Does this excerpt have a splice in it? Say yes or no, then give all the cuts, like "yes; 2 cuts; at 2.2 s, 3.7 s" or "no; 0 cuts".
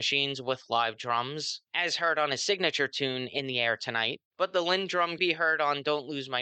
yes; 2 cuts; at 4.3 s, 5.2 s